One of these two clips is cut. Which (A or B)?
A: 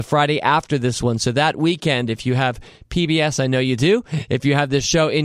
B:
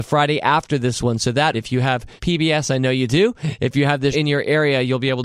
B